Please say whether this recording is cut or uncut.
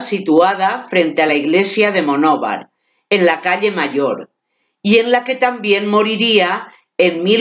uncut